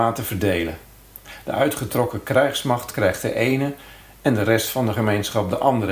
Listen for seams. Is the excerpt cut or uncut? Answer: uncut